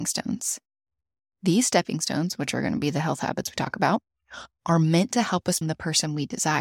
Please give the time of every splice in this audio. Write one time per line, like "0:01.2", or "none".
0:05.6